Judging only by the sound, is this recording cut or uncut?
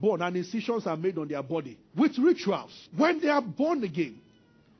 cut